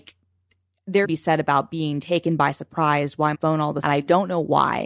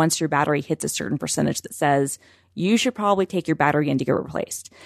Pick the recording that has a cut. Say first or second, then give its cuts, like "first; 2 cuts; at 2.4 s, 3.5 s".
first; 3 cuts; at 1.0 s, 3.3 s, 3.8 s